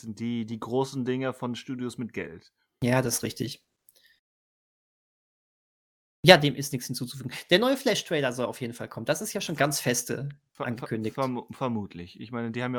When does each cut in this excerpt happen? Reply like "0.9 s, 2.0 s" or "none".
none